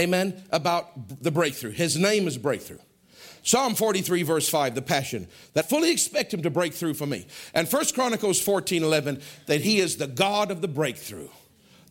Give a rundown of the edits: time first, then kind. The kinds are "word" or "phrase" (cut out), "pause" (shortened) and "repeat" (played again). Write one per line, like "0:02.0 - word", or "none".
0:05.6 - word